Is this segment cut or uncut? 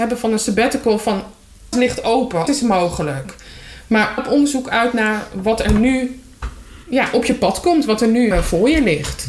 cut